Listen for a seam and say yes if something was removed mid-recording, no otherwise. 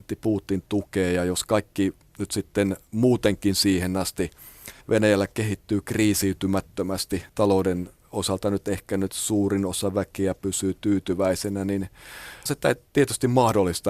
yes